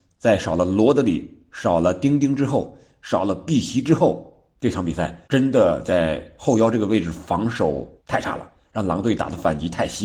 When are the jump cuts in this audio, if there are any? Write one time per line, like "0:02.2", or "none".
0:04.5
0:05.2
0:08.0